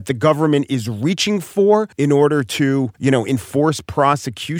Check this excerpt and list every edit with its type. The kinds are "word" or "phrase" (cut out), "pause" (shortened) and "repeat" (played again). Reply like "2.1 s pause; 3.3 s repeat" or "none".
1.9 s pause; 2.9 s pause